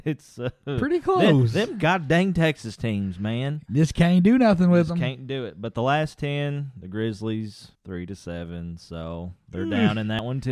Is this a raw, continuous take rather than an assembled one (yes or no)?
no